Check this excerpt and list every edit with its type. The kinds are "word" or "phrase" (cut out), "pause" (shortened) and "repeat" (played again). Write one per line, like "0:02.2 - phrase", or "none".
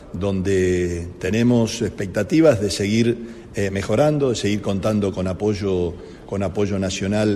none